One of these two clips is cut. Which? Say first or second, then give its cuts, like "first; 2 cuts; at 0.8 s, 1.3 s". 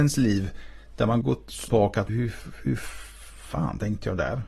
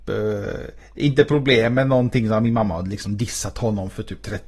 first; 3 cuts; at 1.2 s, 1.7 s, 2.1 s